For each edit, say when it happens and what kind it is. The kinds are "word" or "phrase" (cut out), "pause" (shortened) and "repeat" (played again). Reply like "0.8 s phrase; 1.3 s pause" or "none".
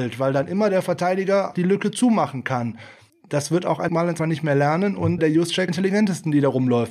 1.5 s word; 3.1 s pause; 3.9 s word; 4.2 s word; 5.2 s word; 5.7 s phrase